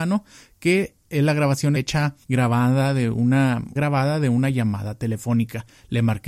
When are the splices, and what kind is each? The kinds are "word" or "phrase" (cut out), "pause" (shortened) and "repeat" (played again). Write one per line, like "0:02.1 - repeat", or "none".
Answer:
0:01.8 - word
0:02.2 - pause
0:03.8 - phrase